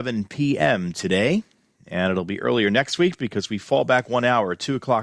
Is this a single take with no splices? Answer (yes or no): yes